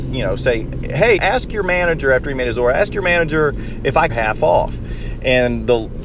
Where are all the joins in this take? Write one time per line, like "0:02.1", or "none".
0:01.2
0:04.1